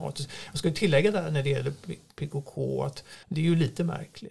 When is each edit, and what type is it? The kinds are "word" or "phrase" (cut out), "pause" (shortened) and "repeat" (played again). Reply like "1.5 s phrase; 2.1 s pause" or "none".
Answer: 3.2 s pause